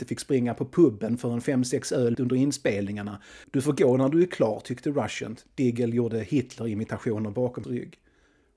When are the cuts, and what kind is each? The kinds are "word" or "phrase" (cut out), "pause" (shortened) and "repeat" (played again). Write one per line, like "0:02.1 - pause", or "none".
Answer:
0:02.1 - word
0:07.6 - word